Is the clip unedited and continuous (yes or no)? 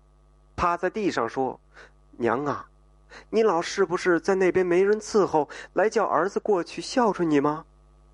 no